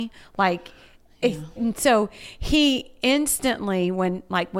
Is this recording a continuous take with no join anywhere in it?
no; 1 cut; at 1.6 s

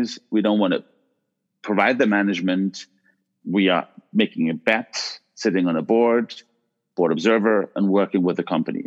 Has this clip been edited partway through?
no; 0 cuts

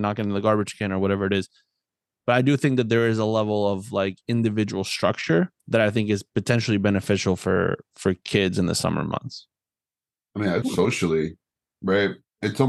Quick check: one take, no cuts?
no; 2 cuts; at 5.6 s, 10.6 s

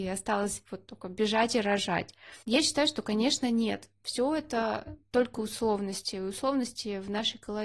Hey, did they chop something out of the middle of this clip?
yes; 1 cut; at 2.4 s

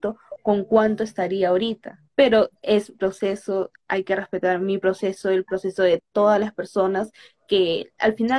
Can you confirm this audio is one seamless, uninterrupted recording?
no; 2 cuts; at 2.1 s, 2.9 s

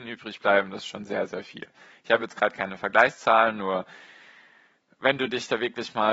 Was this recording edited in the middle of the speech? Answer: no; 0 cuts

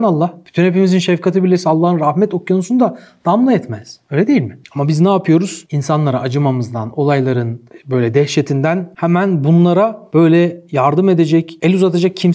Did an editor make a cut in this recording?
no; 0 cuts

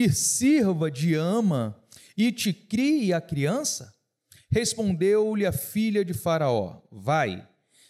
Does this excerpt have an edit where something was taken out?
no; 0 cuts

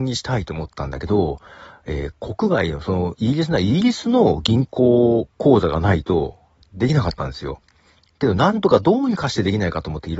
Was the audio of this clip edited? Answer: no; 0 cuts

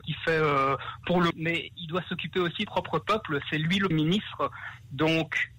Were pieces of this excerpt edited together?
yes; 3 cuts; at 1.3 s, 2.7 s, 3.9 s

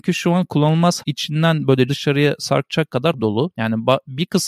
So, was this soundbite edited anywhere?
yes; 3 cuts; at 1.0 s, 1.9 s, 3.1 s

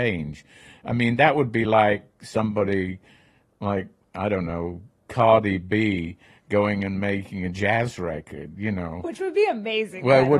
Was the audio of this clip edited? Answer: no; 0 cuts

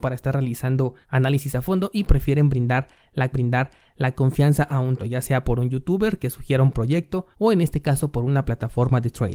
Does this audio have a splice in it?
yes; 4 cuts; at 1.0 s, 3.3 s, 5.0 s, 7.3 s

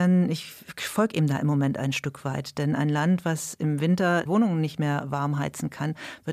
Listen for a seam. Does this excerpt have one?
yes; 1 cut; at 4.3 s

